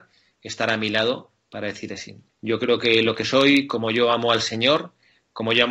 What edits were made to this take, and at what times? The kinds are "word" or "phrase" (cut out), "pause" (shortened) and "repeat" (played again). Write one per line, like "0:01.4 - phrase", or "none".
0:01.9 - word